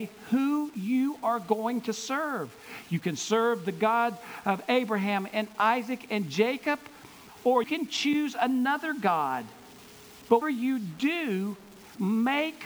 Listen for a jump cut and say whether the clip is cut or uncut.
cut